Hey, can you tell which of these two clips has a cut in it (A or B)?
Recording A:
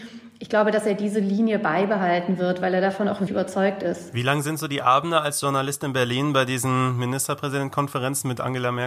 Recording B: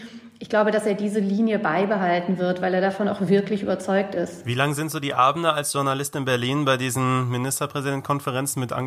A